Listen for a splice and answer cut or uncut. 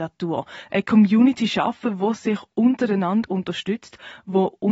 uncut